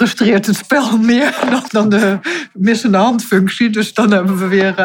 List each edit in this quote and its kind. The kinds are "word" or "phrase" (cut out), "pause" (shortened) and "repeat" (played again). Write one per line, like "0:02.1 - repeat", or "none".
0:01.7 - word